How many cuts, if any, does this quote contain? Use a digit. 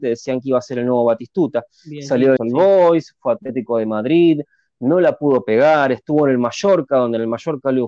1